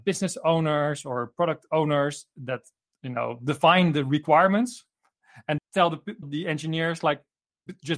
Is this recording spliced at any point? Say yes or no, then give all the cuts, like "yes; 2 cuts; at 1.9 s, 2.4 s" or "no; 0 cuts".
yes; 2 cuts; at 5.6 s, 6.2 s